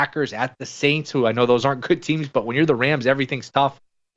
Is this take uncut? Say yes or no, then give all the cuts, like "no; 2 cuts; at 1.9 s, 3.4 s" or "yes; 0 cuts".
yes; 0 cuts